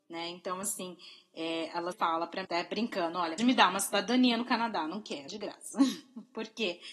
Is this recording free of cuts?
no; 4 cuts; at 1.9 s, 2.4 s, 3.4 s, 5.3 s

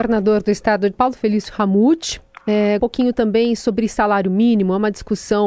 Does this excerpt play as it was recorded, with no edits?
no; 2 cuts; at 0.9 s, 2.8 s

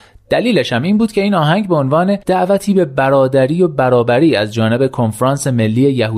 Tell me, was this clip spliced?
yes; 1 cut; at 2.2 s

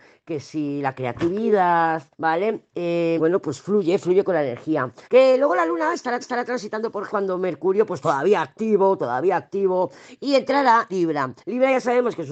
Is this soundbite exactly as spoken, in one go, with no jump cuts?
no; 7 cuts; at 2.1 s, 3.2 s, 5.0 s, 6.2 s, 7.1 s, 10.9 s, 11.4 s

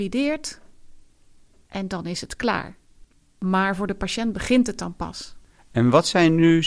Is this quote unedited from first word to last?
yes; 0 cuts

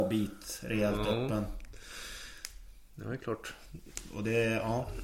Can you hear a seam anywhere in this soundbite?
no; 0 cuts

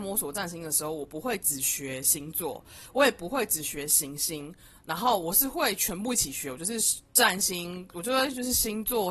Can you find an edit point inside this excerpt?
no; 0 cuts

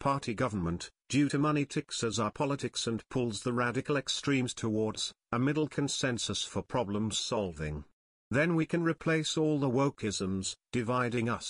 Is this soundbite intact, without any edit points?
yes; 0 cuts

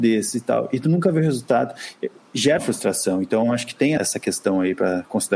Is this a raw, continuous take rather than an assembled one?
no; 2 cuts; at 2.6 s, 4.0 s

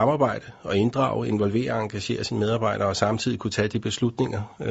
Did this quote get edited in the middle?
no; 0 cuts

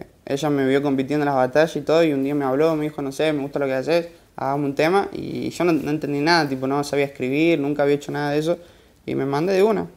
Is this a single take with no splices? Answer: no; 1 cut; at 4.2 s

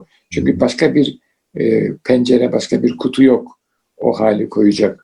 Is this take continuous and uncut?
yes; 0 cuts

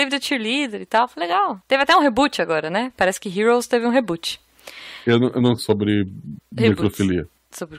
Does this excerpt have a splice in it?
yes; 2 cuts; at 1.6 s, 5.6 s

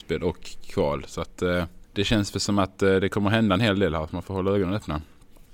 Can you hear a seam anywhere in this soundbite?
yes; 1 cut; at 1.8 s

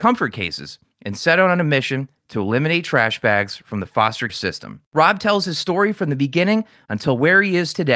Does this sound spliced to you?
yes; 2 cuts; at 4.3 s, 4.9 s

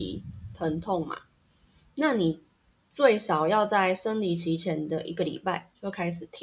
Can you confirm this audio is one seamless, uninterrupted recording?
yes; 0 cuts

